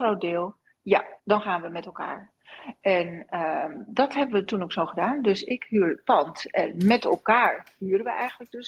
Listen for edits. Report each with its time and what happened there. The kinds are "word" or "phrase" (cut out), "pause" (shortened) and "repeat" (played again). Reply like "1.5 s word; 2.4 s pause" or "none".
1.2 s pause